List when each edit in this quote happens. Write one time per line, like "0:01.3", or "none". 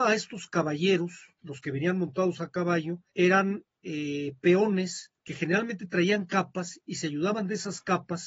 0:01.4
0:03.1
0:05.2

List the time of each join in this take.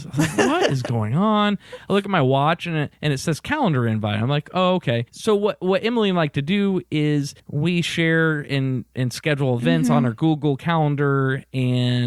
0:02.9
0:05.1
0:07.4

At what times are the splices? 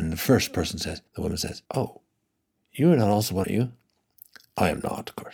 0:01.1
0:01.7
0:03.4

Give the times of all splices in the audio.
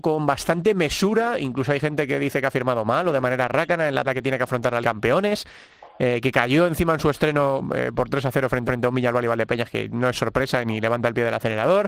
0:04.0
0:04.8
0:08.7

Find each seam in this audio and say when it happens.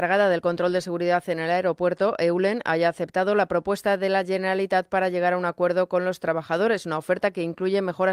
none

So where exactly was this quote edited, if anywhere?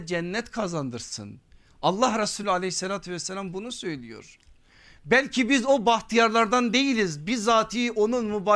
none

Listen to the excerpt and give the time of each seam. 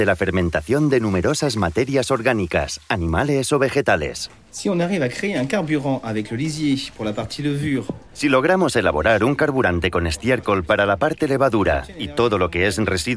none

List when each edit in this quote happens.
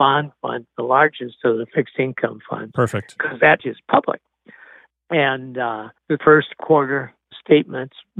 0:03.6
0:06.0

